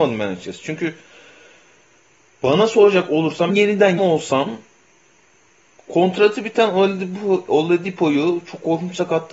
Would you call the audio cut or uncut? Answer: cut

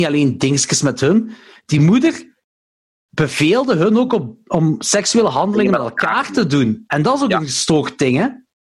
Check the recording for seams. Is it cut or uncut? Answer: uncut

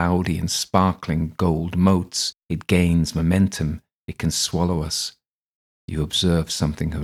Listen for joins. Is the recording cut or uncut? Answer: cut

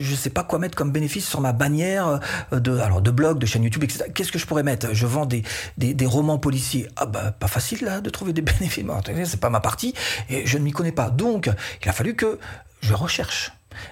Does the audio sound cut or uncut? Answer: uncut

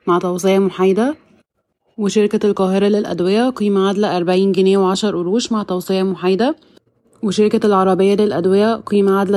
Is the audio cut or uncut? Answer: uncut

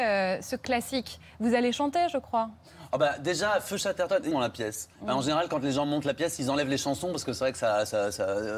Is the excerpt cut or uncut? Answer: cut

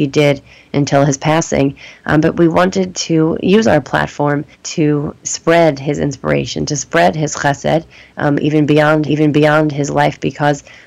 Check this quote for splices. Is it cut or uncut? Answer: cut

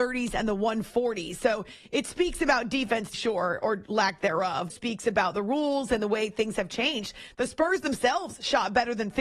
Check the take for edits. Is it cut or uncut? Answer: cut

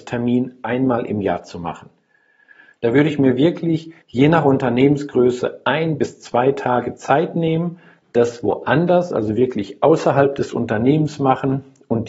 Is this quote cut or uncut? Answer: cut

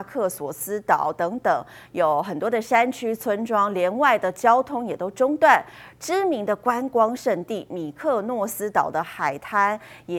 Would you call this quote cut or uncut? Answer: uncut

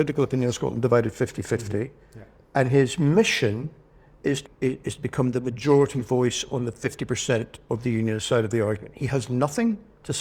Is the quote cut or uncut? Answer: cut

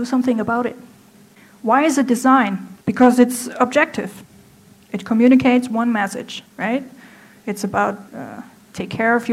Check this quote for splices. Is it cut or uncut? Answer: cut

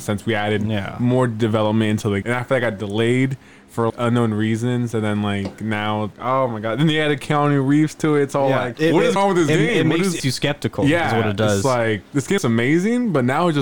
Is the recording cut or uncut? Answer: cut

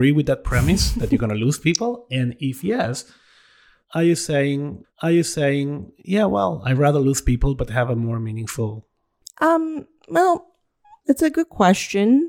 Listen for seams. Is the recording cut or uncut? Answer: cut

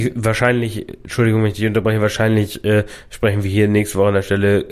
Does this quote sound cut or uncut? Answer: uncut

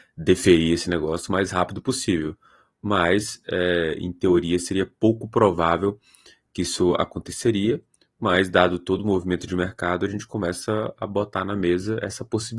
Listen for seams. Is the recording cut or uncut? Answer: uncut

